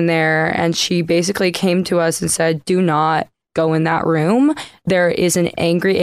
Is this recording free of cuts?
yes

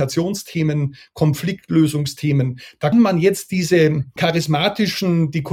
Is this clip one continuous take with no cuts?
no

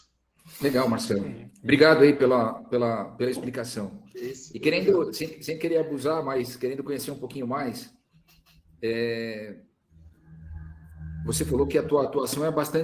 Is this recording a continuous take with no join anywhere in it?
yes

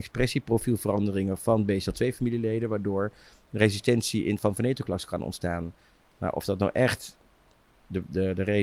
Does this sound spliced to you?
no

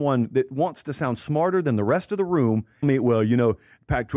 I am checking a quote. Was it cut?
yes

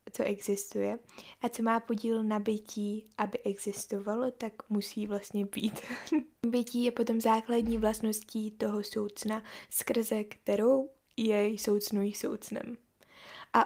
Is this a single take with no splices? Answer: yes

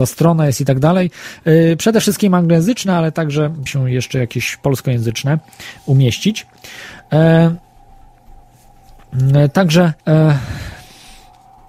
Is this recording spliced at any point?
yes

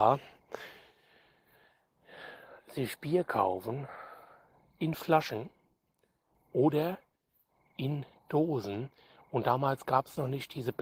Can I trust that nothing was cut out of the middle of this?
yes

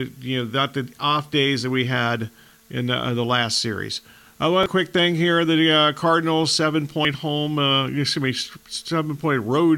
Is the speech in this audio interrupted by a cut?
yes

